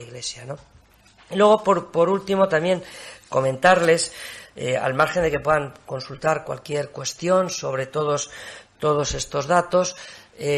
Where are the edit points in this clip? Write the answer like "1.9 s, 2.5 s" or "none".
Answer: none